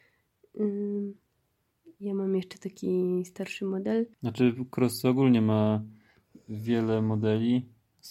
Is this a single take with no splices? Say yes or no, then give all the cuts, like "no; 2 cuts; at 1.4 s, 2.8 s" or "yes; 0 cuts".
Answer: no; 1 cut; at 4.1 s